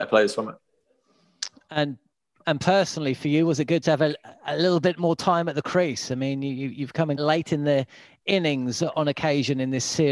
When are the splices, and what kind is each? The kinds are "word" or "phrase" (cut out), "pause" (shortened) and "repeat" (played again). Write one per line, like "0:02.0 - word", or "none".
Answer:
0:03.8 - word
0:07.2 - word